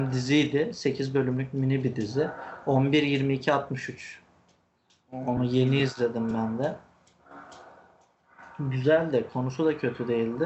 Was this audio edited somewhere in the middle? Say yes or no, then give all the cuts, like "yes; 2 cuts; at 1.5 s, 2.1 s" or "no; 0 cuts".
no; 0 cuts